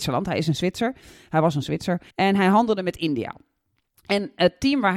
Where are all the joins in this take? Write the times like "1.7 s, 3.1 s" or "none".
2.1 s